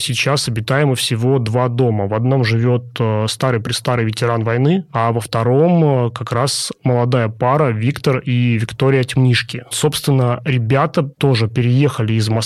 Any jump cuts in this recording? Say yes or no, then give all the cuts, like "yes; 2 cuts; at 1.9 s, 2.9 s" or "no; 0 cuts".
no; 0 cuts